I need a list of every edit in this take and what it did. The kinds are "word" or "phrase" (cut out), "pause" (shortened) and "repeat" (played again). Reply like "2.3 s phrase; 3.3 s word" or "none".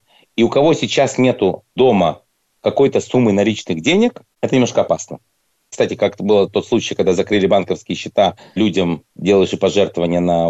none